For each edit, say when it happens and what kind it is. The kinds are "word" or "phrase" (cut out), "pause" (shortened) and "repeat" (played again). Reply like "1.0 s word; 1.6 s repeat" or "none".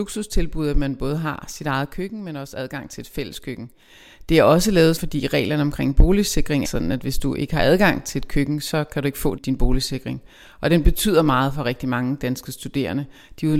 5.0 s word; 6.6 s word; 9.4 s word